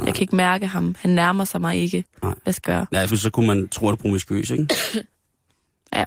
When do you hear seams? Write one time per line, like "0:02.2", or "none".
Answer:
0:02.6
0:03.1
0:03.9